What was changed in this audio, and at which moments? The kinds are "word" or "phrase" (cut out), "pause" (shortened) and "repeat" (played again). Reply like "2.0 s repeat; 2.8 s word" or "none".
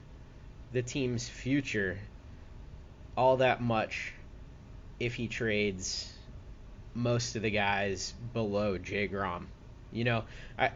none